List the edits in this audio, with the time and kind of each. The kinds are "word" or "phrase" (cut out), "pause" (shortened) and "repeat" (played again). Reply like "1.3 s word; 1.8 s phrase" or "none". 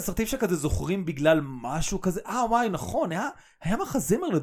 none